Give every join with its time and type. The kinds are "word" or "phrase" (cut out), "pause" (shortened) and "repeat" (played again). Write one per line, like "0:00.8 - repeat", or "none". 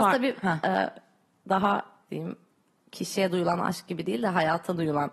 0:02.1 - word